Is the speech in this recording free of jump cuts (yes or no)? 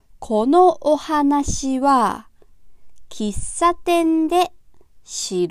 yes